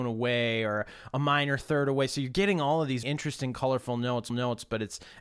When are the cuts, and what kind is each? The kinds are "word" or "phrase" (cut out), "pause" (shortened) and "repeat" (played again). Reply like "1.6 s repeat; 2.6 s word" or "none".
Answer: 3.0 s word; 4.3 s repeat